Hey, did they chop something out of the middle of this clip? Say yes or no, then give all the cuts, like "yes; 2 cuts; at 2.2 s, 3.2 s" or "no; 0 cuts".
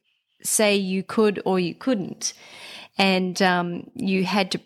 no; 0 cuts